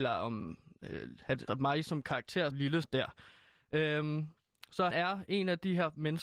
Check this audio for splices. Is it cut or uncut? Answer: cut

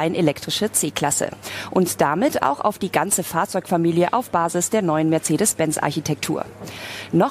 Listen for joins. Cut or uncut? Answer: uncut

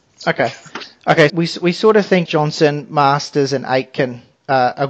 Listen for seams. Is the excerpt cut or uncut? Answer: cut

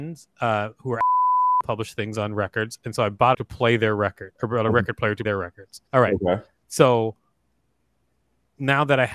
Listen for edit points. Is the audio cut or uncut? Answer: cut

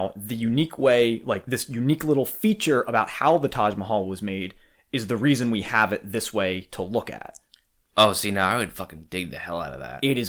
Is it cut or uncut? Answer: uncut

